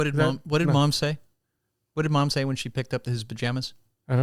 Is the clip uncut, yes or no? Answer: yes